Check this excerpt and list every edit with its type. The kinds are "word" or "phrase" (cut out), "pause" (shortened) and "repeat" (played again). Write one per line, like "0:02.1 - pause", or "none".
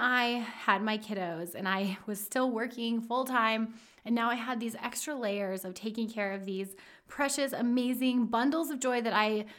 none